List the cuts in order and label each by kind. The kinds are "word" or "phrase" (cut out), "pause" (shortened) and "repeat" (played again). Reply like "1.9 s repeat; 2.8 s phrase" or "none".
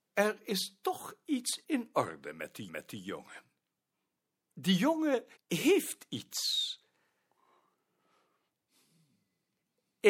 1.6 s word; 2.7 s repeat; 5.4 s pause